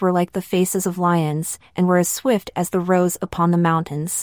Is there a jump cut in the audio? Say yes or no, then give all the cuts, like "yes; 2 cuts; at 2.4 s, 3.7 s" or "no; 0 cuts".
no; 0 cuts